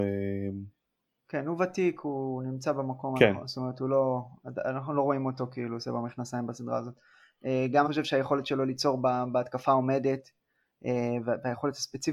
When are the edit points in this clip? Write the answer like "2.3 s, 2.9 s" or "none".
7.8 s